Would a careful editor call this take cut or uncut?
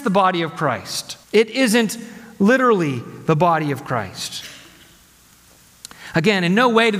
cut